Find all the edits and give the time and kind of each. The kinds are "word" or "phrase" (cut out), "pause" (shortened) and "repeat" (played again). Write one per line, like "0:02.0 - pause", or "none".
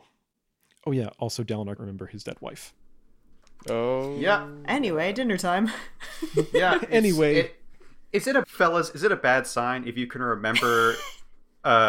0:01.8 - word
0:08.4 - word

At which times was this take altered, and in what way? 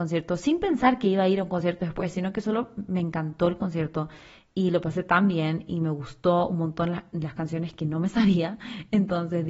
none

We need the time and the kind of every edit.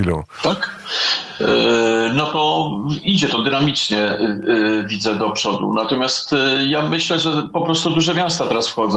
none

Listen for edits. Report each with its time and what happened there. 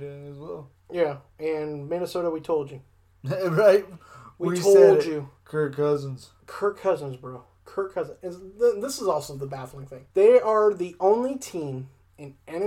0:10.1 - pause

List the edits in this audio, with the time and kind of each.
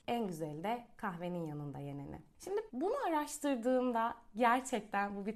0:02.7 - word

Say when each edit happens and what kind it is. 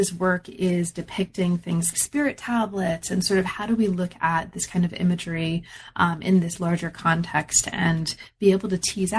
0:01.9 - word

